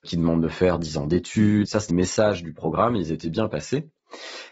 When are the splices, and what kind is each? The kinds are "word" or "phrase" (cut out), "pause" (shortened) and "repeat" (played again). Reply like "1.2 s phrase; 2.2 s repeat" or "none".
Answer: 1.9 s word